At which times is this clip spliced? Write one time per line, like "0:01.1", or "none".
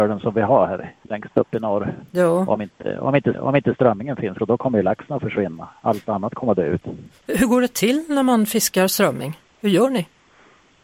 0:01.0
0:03.3
0:04.4